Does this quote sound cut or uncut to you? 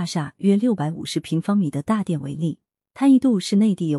uncut